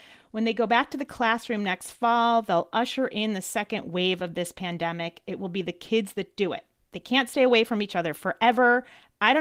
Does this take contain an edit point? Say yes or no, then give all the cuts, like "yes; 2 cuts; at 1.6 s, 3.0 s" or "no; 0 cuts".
no; 0 cuts